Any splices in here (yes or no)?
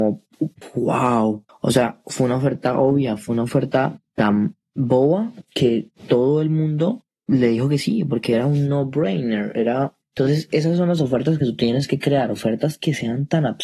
yes